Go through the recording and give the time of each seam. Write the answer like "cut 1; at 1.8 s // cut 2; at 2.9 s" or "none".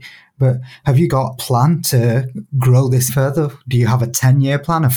cut 1; at 1.4 s // cut 2; at 3.1 s

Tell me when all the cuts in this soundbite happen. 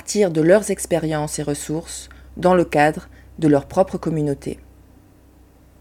none

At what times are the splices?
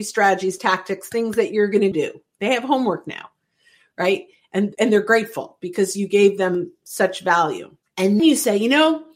cut 1; at 1.9 s // cut 2; at 8.2 s

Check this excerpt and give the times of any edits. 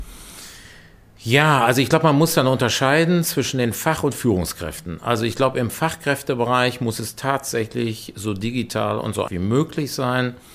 cut 1; at 9.3 s

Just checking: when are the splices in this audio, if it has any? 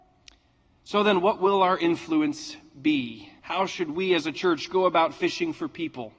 cut 1; at 3.4 s

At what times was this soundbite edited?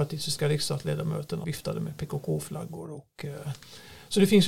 cut 1; at 1.4 s

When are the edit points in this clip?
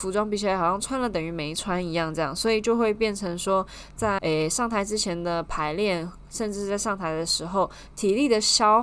cut 1; at 4.2 s

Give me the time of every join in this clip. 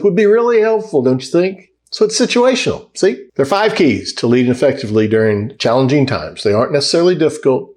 cut 1; at 1.8 s // cut 2; at 3.3 s

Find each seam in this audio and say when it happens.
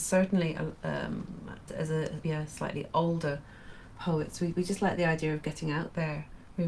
cut 1; at 1.7 s // cut 2; at 2.2 s

